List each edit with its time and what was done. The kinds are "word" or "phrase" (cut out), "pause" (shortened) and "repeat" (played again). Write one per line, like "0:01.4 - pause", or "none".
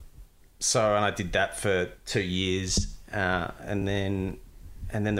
none